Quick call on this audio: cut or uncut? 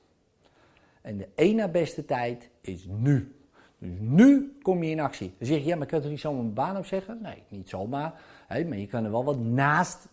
uncut